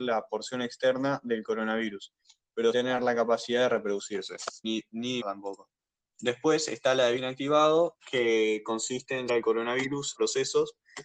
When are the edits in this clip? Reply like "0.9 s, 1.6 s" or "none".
2.7 s, 4.6 s, 5.2 s, 7.2 s, 9.3 s, 10.2 s